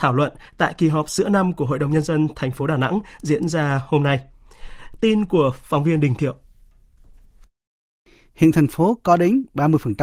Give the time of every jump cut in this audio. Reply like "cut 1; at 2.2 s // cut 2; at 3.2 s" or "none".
none